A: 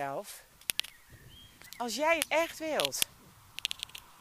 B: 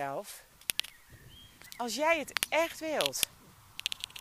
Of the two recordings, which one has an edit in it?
A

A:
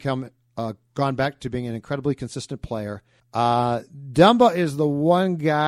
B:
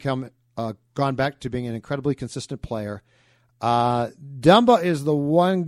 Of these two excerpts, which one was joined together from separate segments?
A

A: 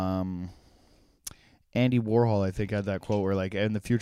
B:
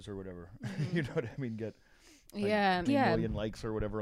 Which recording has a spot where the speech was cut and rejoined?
B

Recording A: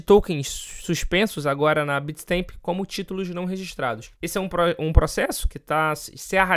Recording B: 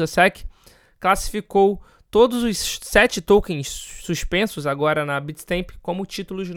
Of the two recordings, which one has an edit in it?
A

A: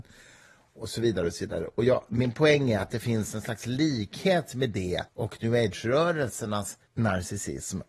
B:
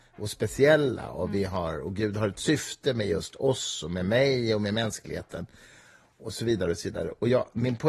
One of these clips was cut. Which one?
A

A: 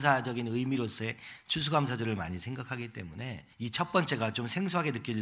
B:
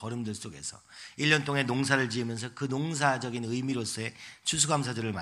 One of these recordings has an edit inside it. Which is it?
A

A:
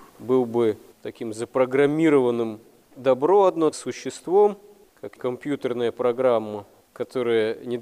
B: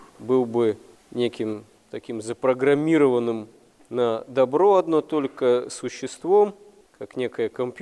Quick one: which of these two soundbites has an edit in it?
A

